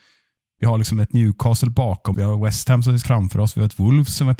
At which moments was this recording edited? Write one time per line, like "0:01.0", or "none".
0:02.1
0:03.0